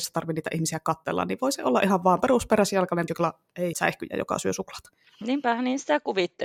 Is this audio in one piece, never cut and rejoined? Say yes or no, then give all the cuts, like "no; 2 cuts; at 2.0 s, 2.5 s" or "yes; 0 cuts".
no; 2 cuts; at 3.1 s, 3.7 s